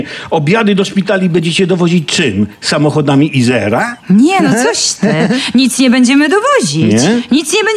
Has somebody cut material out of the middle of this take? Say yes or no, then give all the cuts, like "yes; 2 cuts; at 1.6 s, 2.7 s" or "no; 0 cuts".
yes; 1 cut; at 4.0 s